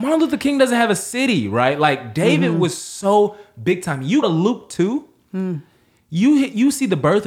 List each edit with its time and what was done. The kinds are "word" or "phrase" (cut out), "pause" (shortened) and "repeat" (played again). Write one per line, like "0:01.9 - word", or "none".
0:04.2 - word